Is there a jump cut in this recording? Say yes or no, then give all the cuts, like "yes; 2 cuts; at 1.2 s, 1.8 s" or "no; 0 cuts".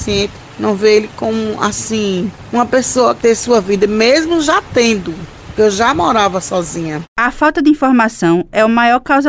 yes; 1 cut; at 3.2 s